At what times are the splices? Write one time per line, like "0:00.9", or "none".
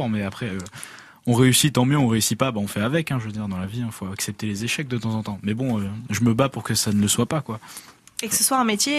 none